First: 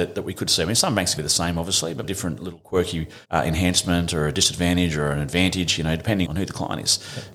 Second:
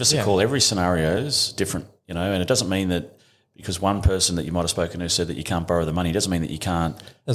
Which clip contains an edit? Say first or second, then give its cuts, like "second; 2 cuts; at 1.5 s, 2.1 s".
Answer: first; 4 cuts; at 1.2 s, 2.0 s, 3.2 s, 6.2 s